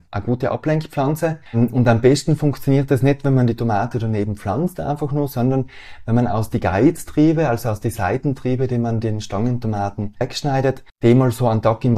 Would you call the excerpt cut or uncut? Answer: uncut